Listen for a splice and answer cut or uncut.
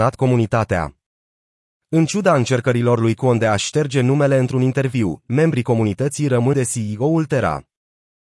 cut